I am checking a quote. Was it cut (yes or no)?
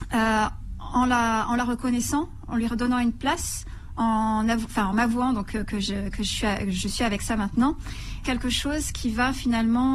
yes